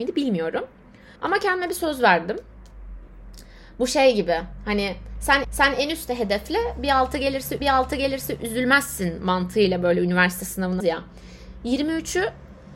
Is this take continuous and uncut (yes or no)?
no